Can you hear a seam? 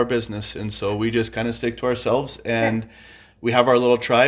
no; 0 cuts

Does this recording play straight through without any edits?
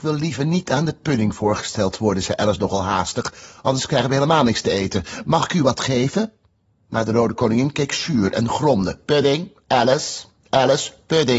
yes; 0 cuts

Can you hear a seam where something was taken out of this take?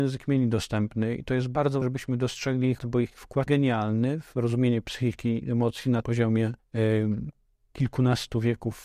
yes; 5 cuts; at 1.8 s, 2.8 s, 3.5 s, 6.0 s, 6.6 s

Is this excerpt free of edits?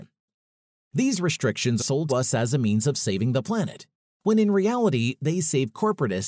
no; 2 cuts; at 1.8 s, 2.1 s

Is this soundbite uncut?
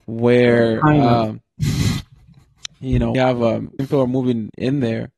no; 2 cuts; at 3.1 s, 3.8 s

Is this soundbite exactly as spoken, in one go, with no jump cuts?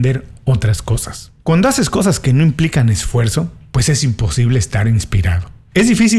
no; 1 cut; at 1.4 s

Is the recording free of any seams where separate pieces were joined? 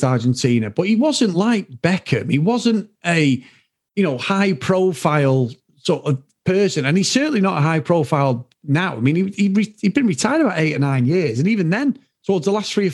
yes; 0 cuts

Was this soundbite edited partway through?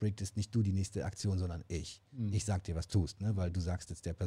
yes; 1 cut; at 2.9 s

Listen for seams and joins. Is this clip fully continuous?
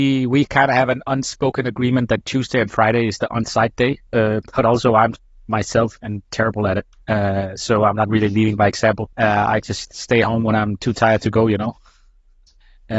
yes; 0 cuts

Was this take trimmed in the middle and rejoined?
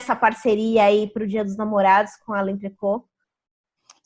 no; 0 cuts

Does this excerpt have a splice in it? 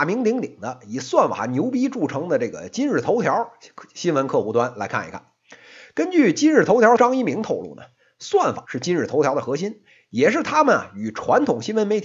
yes; 2 cuts; at 7.0 s, 8.6 s

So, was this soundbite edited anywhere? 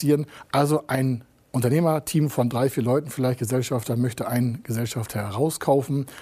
no; 0 cuts

